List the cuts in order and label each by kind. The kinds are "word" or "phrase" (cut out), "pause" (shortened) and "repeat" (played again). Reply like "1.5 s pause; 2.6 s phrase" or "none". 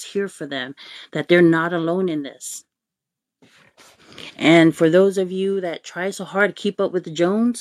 none